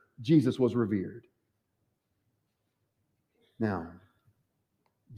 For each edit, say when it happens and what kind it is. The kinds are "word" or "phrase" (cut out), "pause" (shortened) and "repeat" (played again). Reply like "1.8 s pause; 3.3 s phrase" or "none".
none